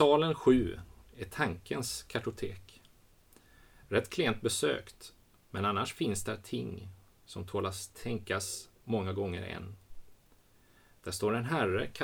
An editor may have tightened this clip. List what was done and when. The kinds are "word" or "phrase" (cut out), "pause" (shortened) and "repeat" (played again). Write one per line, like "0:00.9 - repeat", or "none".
none